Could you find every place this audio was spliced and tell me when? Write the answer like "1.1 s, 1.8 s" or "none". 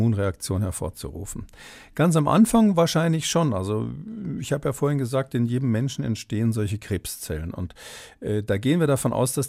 none